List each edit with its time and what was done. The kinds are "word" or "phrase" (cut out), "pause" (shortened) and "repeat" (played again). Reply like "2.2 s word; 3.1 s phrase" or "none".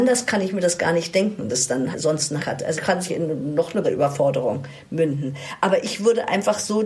1.5 s word; 1.9 s word; 2.4 s word; 2.8 s word; 3.1 s word; 3.8 s word